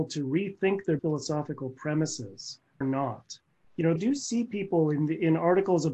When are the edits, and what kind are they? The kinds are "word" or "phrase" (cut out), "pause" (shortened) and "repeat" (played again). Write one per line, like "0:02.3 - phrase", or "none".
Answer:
0:01.0 - word
0:02.8 - word
0:04.0 - phrase

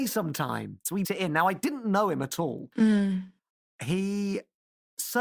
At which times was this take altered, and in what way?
0:01.0 - word

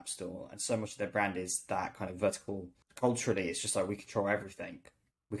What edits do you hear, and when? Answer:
0:02.8 - pause

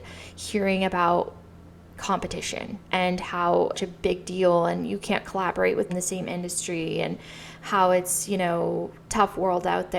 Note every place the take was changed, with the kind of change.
0:02.8 - pause
0:03.7 - phrase
0:05.9 - word
0:09.0 - pause

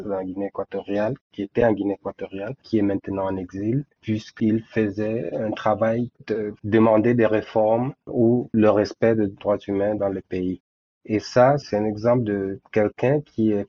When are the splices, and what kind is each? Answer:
0:03.9 - pause
0:08.0 - pause

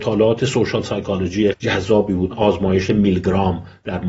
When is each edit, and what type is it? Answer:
0:01.5 - word
0:02.3 - word

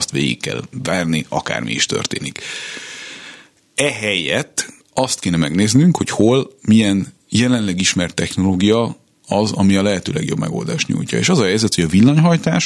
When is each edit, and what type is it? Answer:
0:04.8 - pause

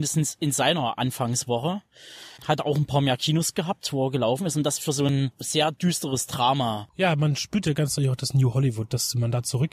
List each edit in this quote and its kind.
0:02.4 - pause

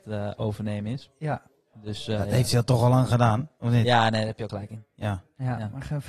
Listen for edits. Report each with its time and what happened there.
0:04.5 - word

